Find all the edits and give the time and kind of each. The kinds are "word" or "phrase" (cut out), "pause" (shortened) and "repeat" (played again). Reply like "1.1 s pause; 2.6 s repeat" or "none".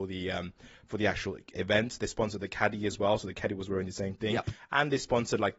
1.5 s word